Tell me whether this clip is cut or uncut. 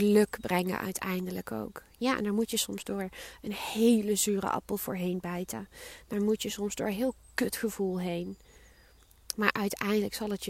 uncut